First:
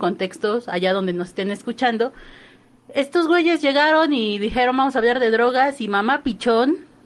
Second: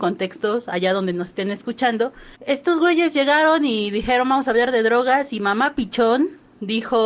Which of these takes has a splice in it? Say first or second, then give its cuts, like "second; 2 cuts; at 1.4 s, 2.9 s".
second; 1 cut; at 2.4 s